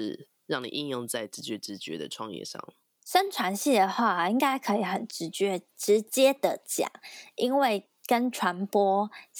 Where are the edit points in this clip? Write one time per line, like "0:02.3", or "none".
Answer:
none